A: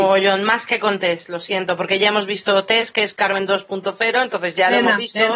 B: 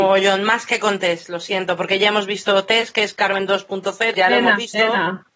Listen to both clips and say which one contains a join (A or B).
B